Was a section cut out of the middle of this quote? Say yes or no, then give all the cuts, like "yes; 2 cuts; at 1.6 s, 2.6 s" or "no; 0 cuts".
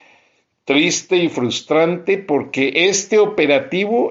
no; 0 cuts